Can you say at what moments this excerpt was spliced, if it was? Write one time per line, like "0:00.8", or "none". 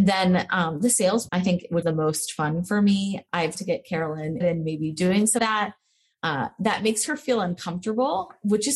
0:01.3
0:01.8
0:03.6
0:04.4
0:05.4